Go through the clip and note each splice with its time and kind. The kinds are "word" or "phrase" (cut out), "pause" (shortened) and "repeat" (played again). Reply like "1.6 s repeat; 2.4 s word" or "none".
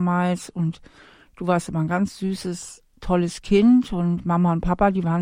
2.9 s pause